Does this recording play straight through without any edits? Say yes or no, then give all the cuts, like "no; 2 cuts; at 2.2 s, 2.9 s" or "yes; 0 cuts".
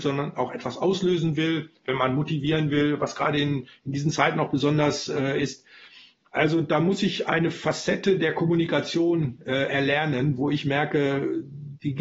yes; 0 cuts